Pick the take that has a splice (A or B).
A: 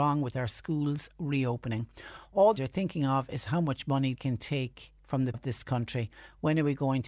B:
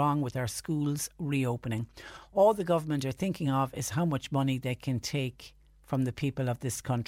A